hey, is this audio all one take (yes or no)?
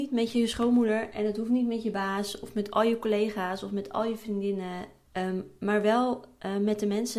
no